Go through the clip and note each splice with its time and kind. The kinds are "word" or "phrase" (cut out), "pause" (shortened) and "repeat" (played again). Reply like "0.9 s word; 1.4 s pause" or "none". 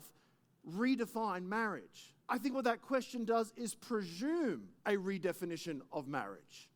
2.2 s pause; 4.8 s pause

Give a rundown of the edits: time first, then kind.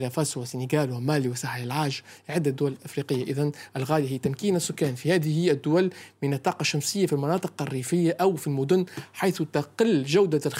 none

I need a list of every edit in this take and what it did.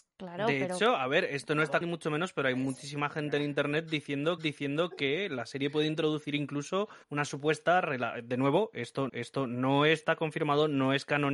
1.8 s word; 4.4 s repeat; 7.0 s pause; 9.1 s repeat

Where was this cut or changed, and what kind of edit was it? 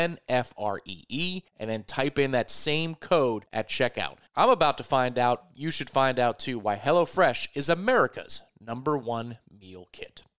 1.5 s pause; 4.3 s pause

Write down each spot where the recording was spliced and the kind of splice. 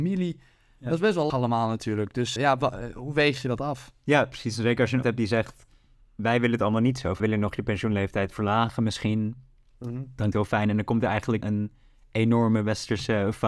1.3 s word; 2.4 s word; 5.0 s word; 7.2 s word; 10.3 s word; 11.4 s word

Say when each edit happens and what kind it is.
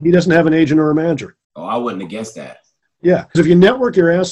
1.4 s pause; 3.3 s word

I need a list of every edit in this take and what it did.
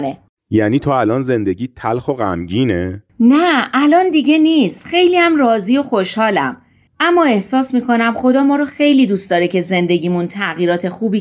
none

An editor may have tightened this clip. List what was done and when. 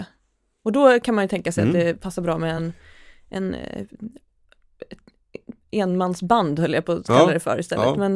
none

